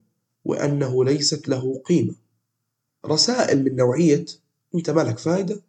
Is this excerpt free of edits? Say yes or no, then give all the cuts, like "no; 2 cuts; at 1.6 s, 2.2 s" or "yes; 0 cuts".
yes; 0 cuts